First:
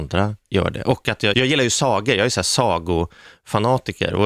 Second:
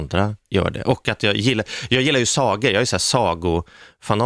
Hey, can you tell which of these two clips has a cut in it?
first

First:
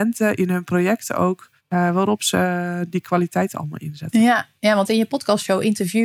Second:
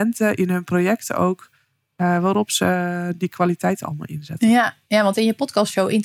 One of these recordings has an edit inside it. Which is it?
first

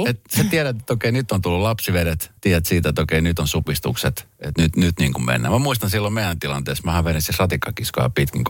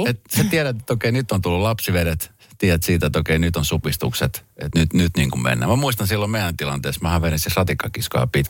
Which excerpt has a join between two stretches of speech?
first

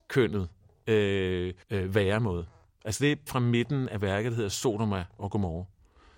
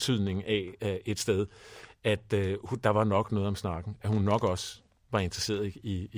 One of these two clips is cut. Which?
first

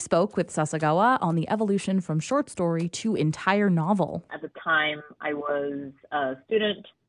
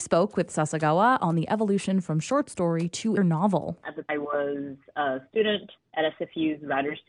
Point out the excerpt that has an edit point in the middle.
second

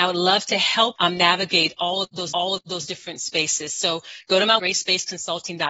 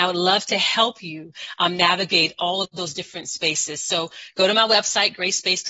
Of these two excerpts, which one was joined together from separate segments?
first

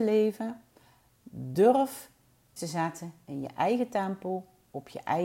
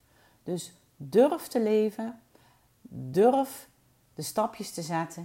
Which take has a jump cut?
first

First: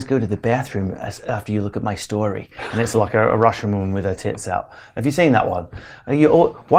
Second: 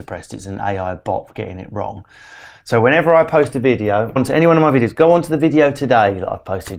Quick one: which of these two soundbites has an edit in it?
second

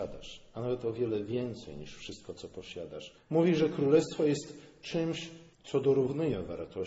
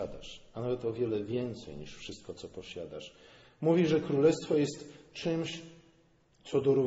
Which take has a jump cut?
first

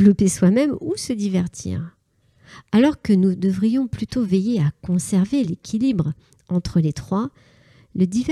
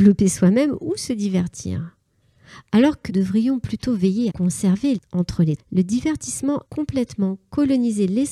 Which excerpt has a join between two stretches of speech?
second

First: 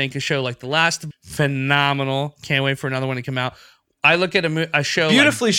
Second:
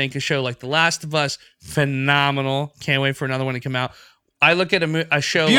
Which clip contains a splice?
first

